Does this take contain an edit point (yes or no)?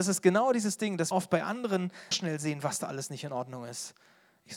yes